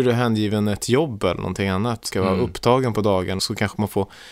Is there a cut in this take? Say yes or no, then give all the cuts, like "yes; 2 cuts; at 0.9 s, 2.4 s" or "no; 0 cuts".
yes; 2 cuts; at 2.1 s, 3.4 s